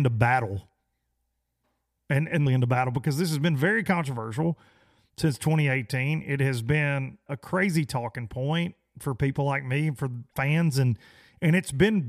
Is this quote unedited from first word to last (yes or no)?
no